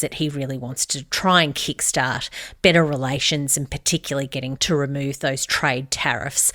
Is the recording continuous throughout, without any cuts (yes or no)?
no